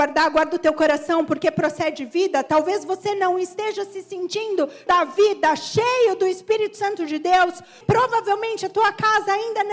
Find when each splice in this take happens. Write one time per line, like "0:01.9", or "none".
0:04.9
0:07.8